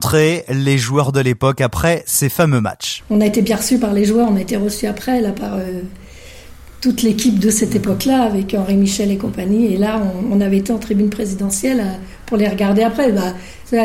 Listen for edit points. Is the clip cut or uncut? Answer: uncut